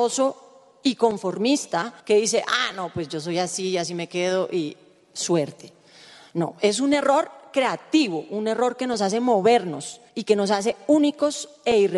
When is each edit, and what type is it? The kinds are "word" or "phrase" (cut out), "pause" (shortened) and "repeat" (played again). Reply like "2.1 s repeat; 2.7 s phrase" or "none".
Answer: 2.0 s pause; 10.1 s pause